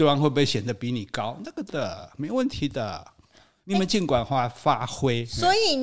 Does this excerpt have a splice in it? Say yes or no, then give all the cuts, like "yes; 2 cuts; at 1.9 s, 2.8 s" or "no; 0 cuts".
yes; 1 cut; at 1.7 s